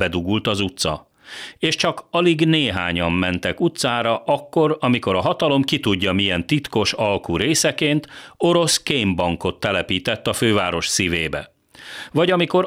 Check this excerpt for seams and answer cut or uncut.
uncut